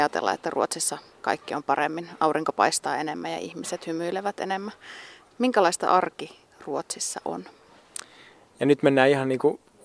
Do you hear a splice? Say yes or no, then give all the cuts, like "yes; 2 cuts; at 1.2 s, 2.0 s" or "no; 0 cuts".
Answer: no; 0 cuts